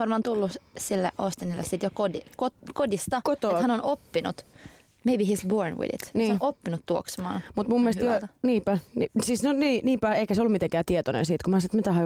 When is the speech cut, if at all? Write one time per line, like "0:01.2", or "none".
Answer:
none